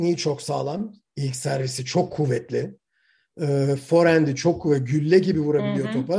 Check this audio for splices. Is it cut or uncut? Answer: uncut